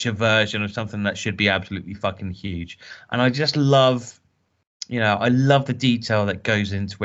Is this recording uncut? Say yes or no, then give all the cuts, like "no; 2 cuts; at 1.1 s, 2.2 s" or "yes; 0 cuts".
yes; 0 cuts